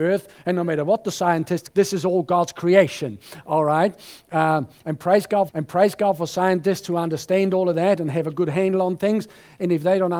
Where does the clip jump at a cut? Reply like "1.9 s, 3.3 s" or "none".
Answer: 1.7 s, 5.5 s